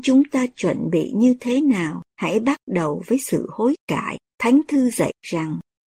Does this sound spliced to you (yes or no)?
yes